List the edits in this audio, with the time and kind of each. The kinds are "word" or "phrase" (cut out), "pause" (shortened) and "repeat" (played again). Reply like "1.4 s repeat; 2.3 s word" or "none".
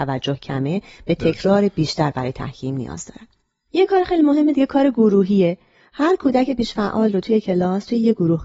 none